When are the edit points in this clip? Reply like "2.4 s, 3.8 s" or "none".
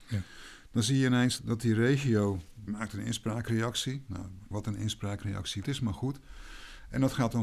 1.4 s, 2.7 s, 4.5 s, 5.6 s